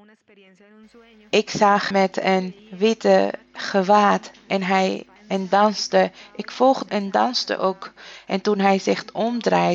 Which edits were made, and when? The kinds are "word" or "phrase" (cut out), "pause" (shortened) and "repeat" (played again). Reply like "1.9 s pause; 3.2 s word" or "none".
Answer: 1.9 s word; 2.6 s pause; 5.2 s word; 6.9 s phrase

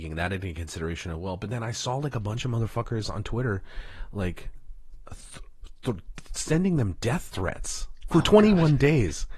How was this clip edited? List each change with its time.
none

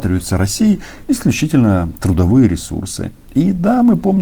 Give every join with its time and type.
2.0 s word

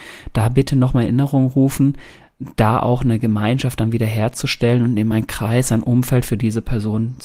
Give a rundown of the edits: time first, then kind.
none

